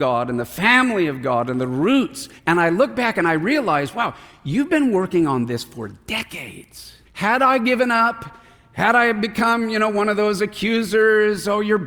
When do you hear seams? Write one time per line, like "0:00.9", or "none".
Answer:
0:02.4
0:07.1